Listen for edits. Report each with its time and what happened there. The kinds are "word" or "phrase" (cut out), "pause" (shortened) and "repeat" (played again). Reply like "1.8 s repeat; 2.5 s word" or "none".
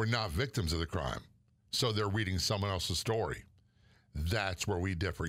none